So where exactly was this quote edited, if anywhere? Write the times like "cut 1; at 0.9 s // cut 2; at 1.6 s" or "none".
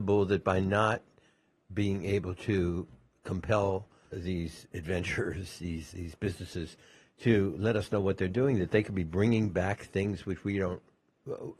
cut 1; at 4.1 s // cut 2; at 5.9 s